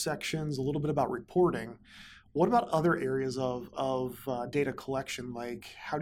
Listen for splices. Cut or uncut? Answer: uncut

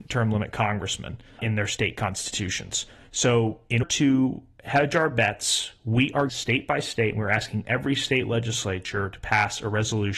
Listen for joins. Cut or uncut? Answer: cut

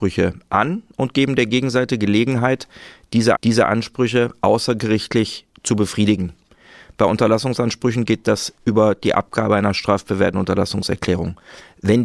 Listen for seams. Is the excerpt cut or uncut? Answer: cut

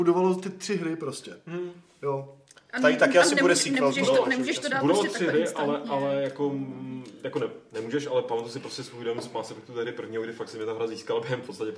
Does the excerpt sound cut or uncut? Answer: uncut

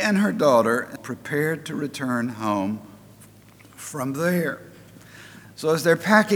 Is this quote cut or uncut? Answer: cut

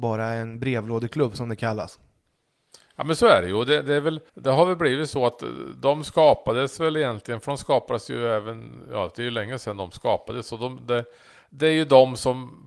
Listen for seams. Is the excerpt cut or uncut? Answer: cut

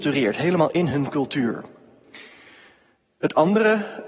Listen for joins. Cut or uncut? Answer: uncut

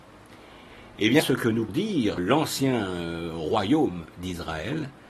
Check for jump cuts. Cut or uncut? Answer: cut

